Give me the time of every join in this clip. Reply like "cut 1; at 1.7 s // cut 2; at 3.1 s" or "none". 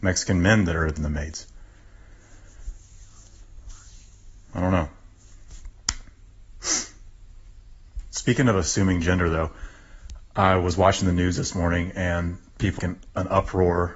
cut 1; at 1.0 s // cut 2; at 12.8 s